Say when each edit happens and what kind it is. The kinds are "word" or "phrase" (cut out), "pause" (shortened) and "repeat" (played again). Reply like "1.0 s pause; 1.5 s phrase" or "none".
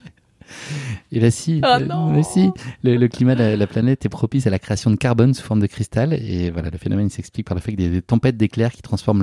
none